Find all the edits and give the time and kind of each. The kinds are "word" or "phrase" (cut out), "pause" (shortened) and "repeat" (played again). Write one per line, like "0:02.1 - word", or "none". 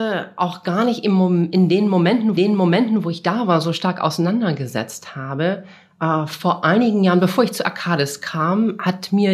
0:02.4 - repeat